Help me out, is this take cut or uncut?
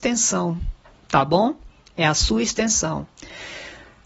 uncut